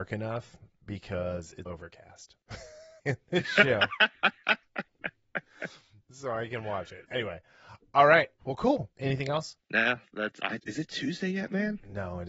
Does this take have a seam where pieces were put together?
yes; 7 cuts; at 1.7 s, 3.0 s, 7.0 s, 8.4 s, 8.9 s, 9.6 s, 10.6 s

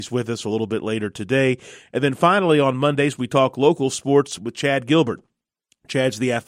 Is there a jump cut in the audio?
no; 0 cuts

